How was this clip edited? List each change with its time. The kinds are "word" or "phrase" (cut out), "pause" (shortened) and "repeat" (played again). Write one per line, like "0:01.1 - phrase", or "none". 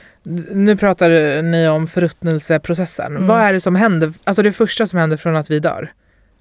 none